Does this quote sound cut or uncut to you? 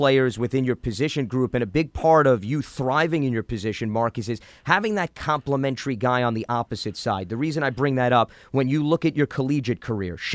uncut